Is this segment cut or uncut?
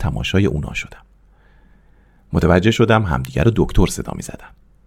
uncut